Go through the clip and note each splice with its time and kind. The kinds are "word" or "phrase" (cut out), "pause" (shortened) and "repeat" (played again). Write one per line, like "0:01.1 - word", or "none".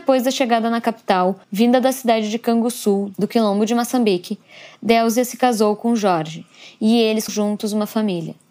0:01.4 - pause
0:07.3 - word